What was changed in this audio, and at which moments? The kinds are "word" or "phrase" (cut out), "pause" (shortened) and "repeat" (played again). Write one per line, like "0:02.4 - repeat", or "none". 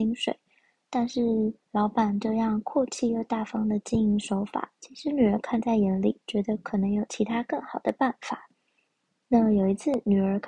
0:06.2 - pause